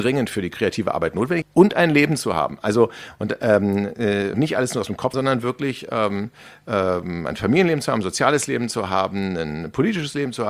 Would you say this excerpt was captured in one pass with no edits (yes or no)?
no